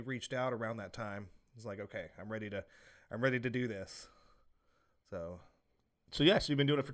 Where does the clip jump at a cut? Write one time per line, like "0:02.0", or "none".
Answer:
none